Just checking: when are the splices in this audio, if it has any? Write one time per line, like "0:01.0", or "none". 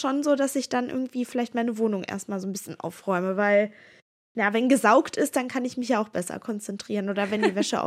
none

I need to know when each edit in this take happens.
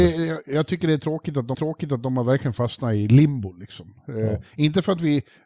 0:01.5

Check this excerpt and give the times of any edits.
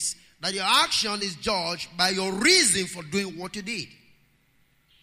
none

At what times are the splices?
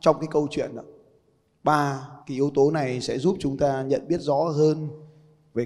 0:02.2

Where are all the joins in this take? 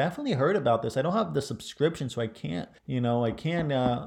0:02.8

